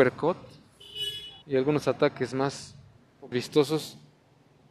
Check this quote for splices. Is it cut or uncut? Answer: cut